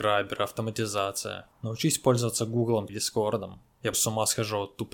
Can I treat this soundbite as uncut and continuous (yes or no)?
no